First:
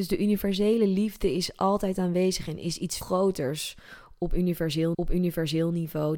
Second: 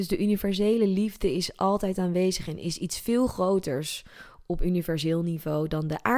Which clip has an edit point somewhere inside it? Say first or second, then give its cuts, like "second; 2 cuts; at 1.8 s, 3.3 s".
first; 2 cuts; at 3.0 s, 4.9 s